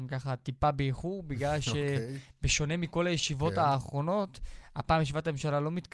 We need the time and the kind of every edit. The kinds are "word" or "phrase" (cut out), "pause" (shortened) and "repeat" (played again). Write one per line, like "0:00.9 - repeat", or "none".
none

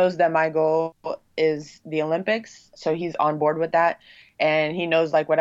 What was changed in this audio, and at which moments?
none

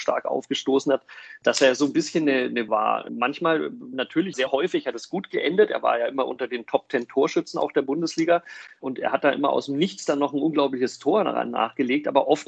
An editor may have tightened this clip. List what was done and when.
0:02.7 - word
0:04.3 - phrase

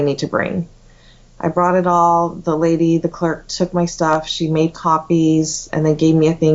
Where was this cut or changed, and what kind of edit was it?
none

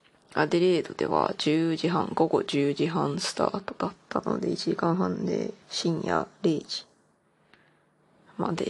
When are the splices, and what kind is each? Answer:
0:04.0 - pause
0:05.6 - pause

